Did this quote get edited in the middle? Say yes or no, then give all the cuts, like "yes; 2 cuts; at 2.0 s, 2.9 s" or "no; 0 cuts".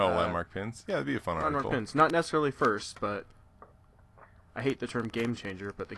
no; 0 cuts